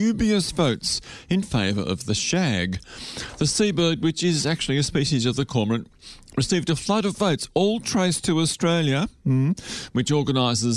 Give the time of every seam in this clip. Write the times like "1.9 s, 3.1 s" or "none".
none